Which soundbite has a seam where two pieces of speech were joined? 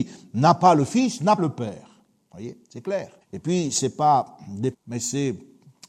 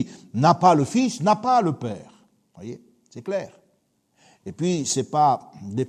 first; 4 cuts; at 1.4 s, 2.6 s, 3.2 s, 4.7 s

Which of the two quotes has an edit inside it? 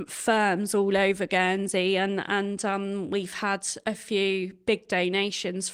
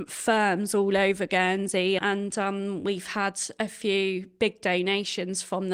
second; 1 cut; at 2.0 s

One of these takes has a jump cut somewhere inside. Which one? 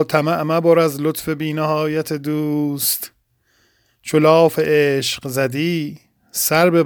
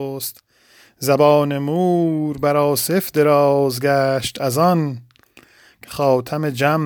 second; 1 cut; at 5.8 s

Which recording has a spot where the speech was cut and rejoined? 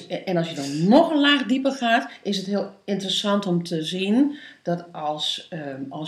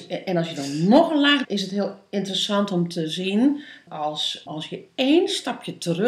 second; 3 cuts; at 1.4 s, 3.9 s, 4.5 s

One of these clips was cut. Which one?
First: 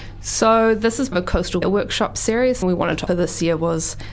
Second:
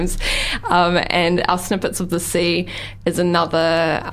first; 4 cuts; at 1.1 s, 1.6 s, 2.6 s, 3.1 s

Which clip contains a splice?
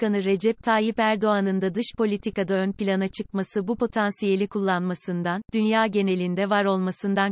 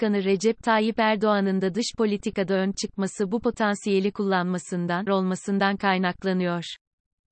second; 2 cuts; at 2.7 s, 5.1 s

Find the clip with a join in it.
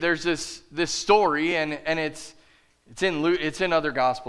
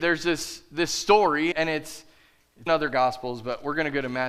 second; 2 cuts; at 1.5 s, 2.7 s

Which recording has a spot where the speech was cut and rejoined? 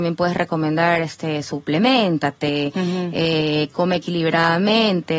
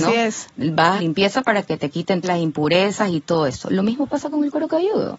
second; 2 cuts; at 1.0 s, 2.2 s

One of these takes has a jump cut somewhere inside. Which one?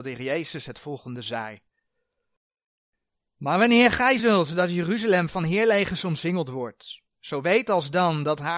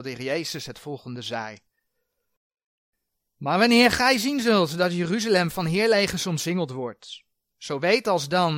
first; 2 cuts; at 4.2 s, 7.1 s

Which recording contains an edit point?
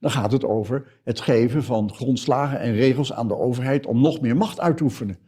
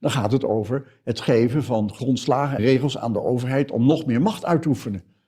second; 1 cut; at 2.6 s

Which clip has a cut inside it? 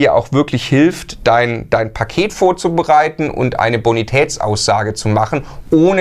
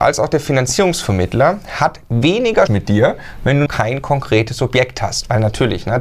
second; 2 cuts; at 2.7 s, 3.7 s

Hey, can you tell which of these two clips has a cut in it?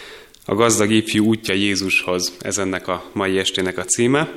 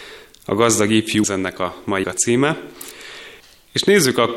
second; 3 cuts; at 1.2 s, 2.0 s, 3.4 s

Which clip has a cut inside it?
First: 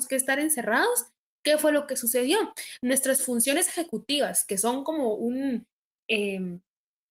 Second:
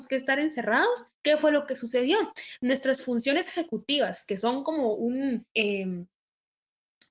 second; 2 cuts; at 1.1 s, 5.5 s

